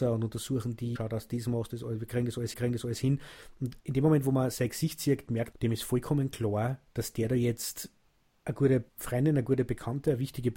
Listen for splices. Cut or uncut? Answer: cut